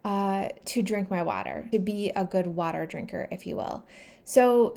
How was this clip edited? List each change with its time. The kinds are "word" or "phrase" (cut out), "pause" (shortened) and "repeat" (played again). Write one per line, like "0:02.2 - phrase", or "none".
0:01.7 - word